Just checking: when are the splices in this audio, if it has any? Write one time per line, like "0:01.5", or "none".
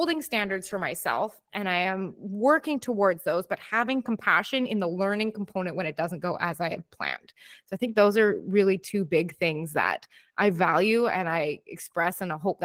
none